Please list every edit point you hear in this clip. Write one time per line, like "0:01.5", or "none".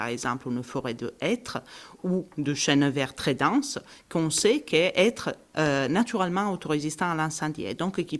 none